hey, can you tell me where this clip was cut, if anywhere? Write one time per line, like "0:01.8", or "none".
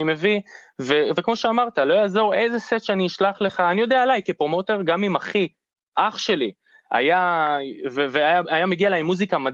none